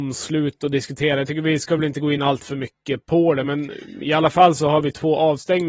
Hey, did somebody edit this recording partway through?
no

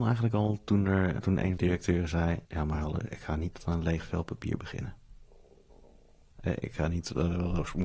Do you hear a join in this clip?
yes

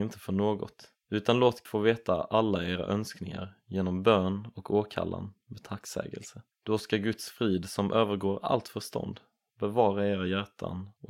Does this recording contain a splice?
yes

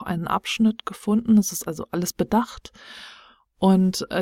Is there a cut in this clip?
no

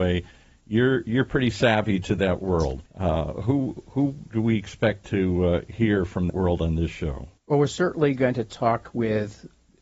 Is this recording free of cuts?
no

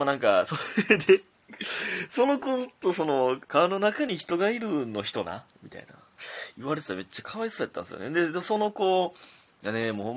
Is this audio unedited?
no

